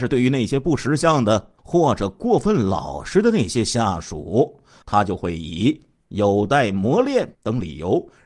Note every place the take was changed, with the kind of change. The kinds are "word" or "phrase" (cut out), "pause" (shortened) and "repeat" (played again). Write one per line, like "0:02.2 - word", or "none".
0:01.6 - pause
0:04.8 - word
0:07.3 - pause